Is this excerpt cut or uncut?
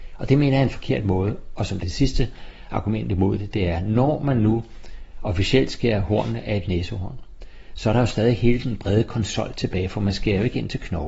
uncut